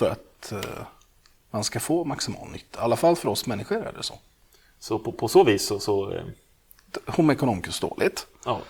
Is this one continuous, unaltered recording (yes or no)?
no